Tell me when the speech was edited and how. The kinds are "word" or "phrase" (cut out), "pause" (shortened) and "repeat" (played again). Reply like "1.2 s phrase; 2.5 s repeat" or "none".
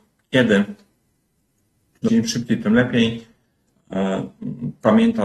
2.1 s word